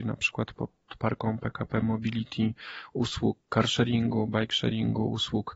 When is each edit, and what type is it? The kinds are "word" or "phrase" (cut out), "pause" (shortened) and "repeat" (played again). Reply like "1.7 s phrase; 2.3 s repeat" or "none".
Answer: none